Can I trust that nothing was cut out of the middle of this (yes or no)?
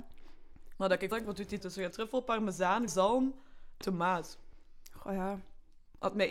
no